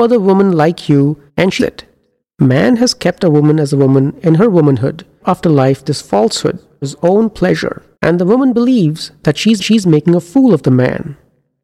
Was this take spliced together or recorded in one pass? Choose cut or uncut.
cut